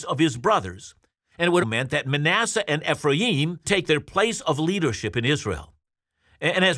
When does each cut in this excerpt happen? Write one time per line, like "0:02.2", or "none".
0:01.6
0:03.6

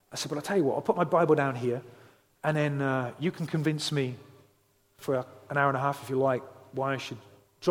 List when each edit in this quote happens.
none

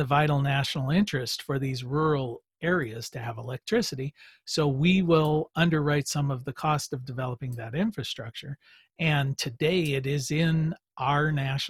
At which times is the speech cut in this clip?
none

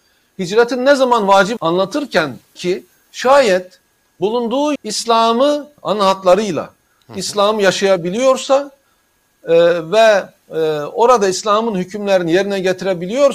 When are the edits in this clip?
0:01.6
0:02.6
0:04.8
0:05.8

